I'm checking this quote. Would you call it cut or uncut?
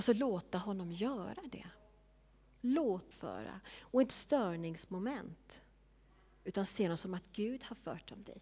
cut